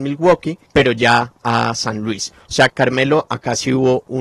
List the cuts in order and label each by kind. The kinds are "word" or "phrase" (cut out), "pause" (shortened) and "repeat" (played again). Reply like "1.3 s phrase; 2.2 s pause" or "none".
1.4 s phrase; 2.7 s word